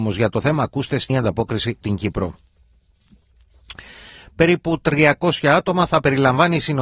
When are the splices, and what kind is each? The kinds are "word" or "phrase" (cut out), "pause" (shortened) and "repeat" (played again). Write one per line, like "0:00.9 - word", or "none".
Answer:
0:01.1 - word
0:01.8 - word